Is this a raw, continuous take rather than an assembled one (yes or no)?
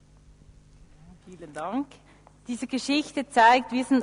no